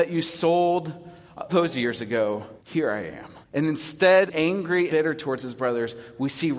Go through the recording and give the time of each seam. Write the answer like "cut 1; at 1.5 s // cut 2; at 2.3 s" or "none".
cut 1; at 1.5 s // cut 2; at 2.6 s // cut 3; at 3.4 s // cut 4; at 4.3 s // cut 5; at 4.9 s